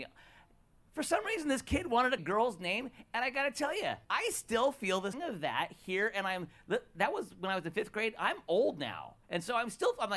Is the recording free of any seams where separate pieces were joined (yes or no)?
no